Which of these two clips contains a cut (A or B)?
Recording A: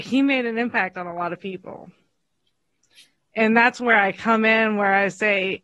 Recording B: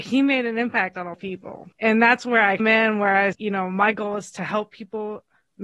B